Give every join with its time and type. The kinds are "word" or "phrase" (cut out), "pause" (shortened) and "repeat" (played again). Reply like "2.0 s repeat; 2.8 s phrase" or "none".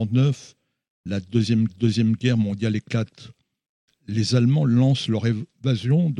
1.7 s repeat